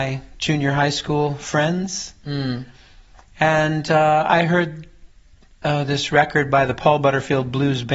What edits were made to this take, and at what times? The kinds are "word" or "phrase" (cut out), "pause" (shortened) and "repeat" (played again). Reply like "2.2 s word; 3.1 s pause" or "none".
none